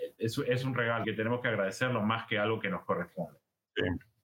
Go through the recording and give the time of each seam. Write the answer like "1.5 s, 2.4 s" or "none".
1.0 s

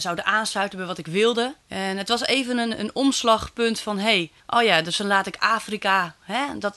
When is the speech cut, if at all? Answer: 1.6 s, 4.4 s

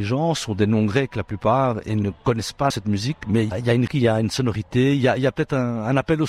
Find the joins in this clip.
2.7 s, 3.5 s, 3.9 s

